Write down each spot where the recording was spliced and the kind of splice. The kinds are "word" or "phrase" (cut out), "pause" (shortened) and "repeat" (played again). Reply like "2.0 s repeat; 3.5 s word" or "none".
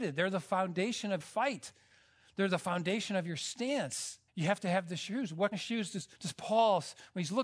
1.2 s word; 4.3 s pause; 5.5 s word; 6.1 s pause